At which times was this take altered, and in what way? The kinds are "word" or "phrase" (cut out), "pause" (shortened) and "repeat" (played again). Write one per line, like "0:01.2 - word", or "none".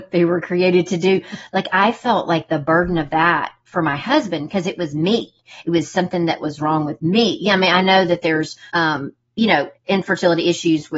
0:08.7 - pause
0:09.8 - pause